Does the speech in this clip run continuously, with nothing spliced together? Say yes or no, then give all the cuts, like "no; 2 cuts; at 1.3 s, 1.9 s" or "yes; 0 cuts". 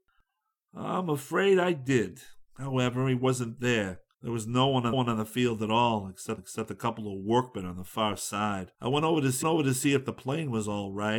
no; 6 cuts; at 2.4 s, 4.1 s, 4.9 s, 6.4 s, 8.7 s, 9.4 s